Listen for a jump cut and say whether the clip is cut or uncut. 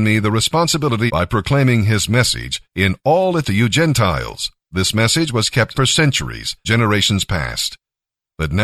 cut